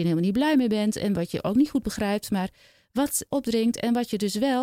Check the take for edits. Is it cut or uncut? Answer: cut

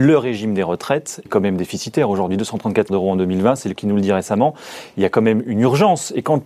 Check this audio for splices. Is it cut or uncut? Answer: cut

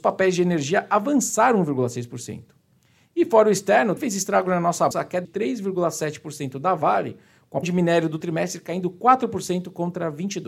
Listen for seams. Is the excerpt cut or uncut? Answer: cut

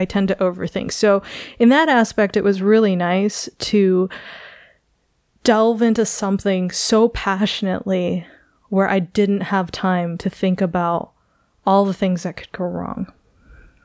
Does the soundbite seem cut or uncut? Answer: uncut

